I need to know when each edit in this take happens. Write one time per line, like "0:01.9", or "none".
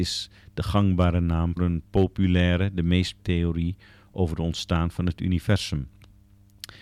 0:01.6
0:03.2